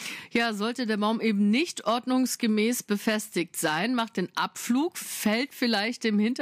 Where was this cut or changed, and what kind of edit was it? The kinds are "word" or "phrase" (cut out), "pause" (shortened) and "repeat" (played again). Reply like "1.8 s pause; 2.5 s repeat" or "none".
none

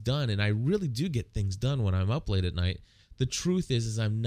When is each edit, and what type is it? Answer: none

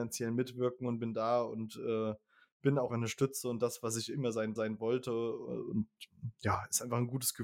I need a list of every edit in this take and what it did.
2.9 s word; 4.6 s repeat

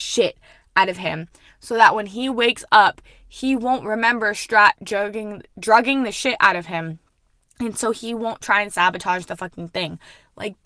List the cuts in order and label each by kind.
none

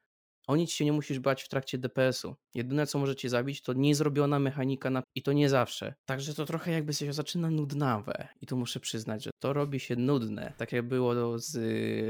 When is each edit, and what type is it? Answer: 5.0 s word; 6.0 s pause

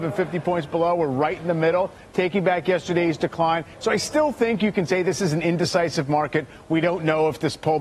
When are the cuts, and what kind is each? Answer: none

